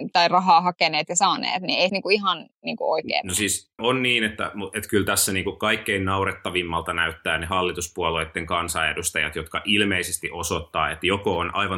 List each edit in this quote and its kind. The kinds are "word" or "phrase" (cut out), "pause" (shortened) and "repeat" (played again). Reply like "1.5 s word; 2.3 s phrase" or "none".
1.9 s phrase; 3.8 s word